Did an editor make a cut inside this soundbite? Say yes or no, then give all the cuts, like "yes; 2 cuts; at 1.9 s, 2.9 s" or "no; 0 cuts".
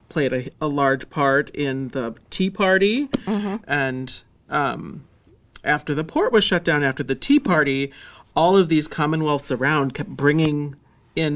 no; 0 cuts